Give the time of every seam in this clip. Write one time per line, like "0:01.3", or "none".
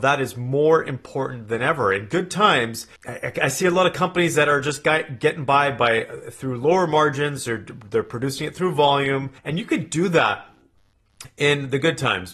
0:03.0
0:09.4